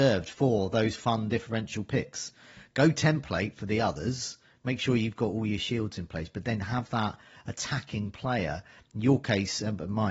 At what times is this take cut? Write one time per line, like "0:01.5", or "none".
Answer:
none